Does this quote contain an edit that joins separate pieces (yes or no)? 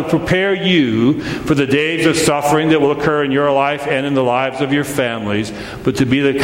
no